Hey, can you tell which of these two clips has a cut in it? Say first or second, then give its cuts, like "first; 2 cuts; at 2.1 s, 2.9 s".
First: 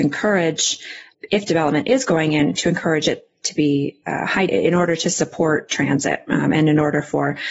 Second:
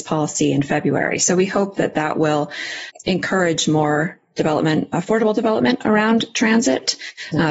first; 1 cut; at 4.5 s